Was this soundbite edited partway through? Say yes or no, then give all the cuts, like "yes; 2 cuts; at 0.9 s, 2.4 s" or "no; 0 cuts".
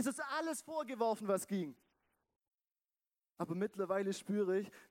no; 0 cuts